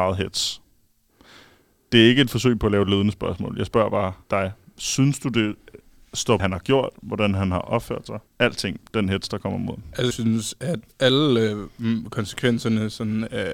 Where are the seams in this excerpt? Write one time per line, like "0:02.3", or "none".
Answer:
0:04.2
0:06.4
0:08.3
0:10.1